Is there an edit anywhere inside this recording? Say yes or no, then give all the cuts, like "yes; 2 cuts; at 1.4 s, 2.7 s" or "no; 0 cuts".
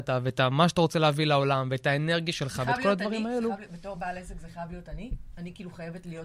no; 0 cuts